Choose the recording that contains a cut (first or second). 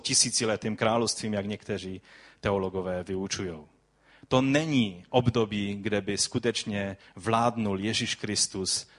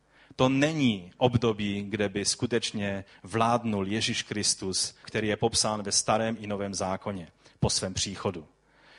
second